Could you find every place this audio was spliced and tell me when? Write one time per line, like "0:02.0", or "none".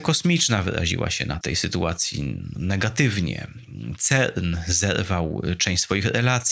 0:01.4
0:02.5